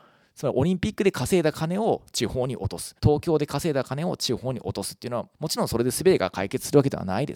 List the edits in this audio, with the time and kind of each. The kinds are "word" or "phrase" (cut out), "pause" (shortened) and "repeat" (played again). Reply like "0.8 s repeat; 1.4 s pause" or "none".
3.0 s pause; 5.3 s pause